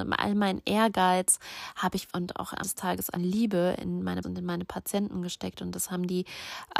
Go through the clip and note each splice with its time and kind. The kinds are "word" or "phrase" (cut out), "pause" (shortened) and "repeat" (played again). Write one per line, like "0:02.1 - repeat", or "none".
0:02.1 - word
0:02.6 - word
0:03.2 - word
0:04.2 - word